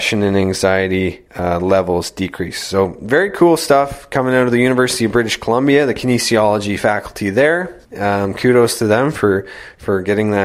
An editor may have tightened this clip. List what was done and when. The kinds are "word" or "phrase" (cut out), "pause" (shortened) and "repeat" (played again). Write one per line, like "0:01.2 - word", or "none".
0:01.3 - pause
0:07.8 - pause

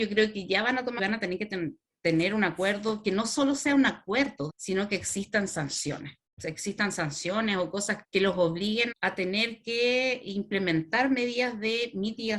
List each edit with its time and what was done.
0:01.0 - phrase
0:01.8 - pause
0:04.5 - phrase
0:06.3 - pause
0:08.0 - word
0:08.9 - word

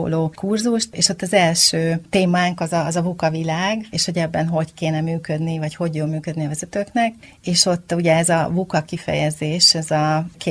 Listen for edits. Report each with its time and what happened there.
none

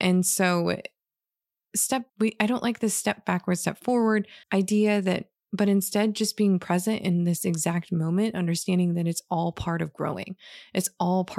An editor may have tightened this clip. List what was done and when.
0:02.1 - pause
0:04.4 - pause

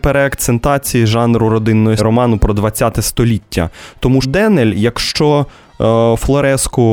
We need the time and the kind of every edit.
0:02.0 - phrase
0:04.2 - word

